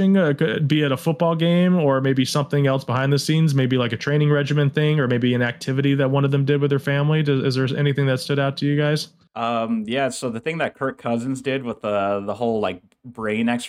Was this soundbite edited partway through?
no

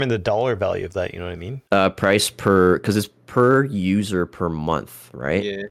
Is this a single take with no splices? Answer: no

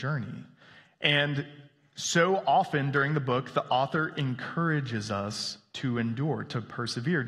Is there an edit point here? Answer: no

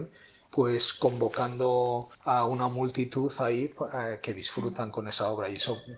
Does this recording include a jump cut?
yes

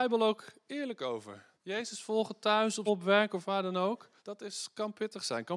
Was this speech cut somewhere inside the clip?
yes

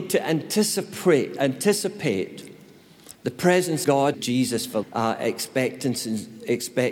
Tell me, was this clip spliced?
yes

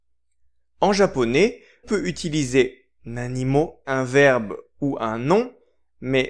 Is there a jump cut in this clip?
yes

